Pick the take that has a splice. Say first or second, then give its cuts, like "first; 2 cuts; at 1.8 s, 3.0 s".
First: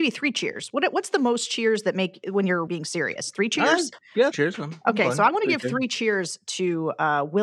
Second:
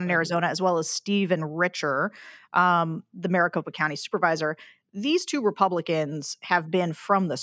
first; 2 cuts; at 2.7 s, 4.3 s